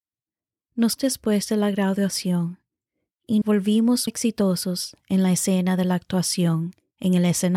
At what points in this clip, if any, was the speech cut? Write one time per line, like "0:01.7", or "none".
0:01.0
0:03.4
0:04.1